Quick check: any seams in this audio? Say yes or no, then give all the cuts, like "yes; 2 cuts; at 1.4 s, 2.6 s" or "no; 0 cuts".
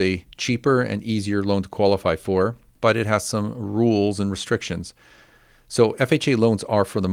no; 0 cuts